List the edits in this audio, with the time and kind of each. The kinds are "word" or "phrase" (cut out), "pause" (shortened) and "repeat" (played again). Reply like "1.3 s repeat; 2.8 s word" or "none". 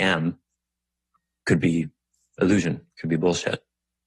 2.9 s pause